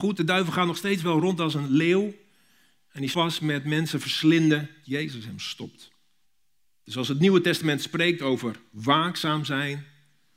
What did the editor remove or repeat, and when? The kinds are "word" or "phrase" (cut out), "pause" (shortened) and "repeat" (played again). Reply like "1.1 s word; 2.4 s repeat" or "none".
3.1 s word; 4.8 s word; 6.2 s pause

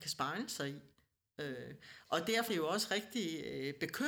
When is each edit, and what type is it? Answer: 2.5 s word

